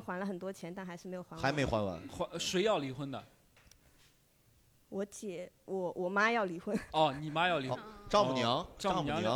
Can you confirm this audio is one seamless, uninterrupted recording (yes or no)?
no